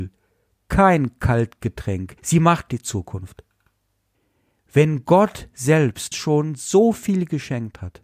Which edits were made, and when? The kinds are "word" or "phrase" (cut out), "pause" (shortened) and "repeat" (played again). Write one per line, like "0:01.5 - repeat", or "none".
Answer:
0:02.2 - pause
0:02.7 - phrase
0:04.1 - pause
0:06.1 - word